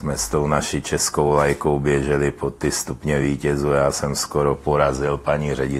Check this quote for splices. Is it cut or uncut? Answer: uncut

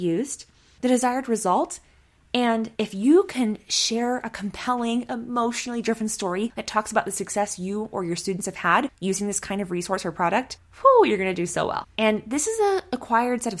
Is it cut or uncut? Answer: cut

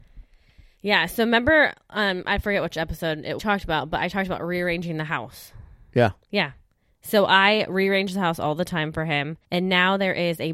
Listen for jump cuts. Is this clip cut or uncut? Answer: cut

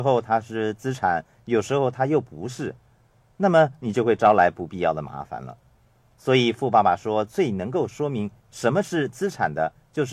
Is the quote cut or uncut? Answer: uncut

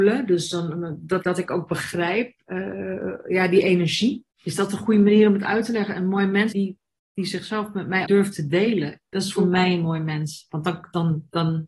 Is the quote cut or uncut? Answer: cut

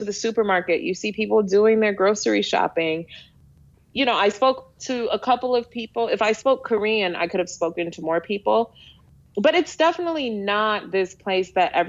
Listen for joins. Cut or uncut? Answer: uncut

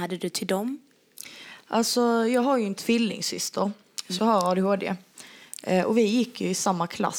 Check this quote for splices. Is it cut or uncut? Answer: cut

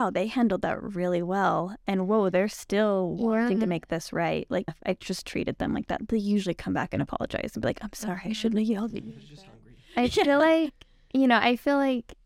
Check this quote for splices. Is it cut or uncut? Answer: cut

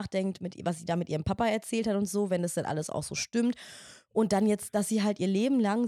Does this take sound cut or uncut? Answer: uncut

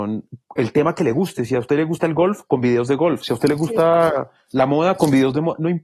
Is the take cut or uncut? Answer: uncut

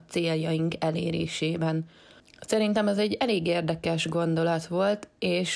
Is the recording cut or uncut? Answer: uncut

